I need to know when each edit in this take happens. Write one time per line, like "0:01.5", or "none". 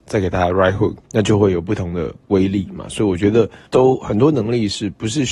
0:01.0
0:03.7